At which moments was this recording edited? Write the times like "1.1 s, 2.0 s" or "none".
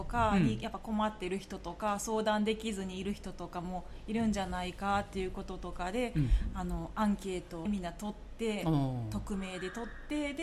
7.7 s